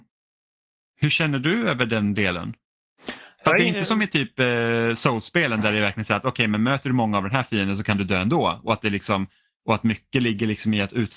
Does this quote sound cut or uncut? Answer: uncut